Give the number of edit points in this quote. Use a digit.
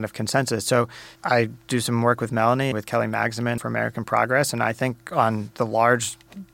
3